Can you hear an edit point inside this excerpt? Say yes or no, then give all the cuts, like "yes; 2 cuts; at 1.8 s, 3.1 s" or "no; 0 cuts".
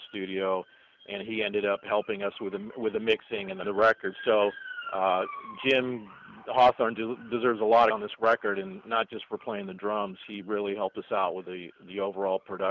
yes; 2 cuts; at 3.6 s, 7.9 s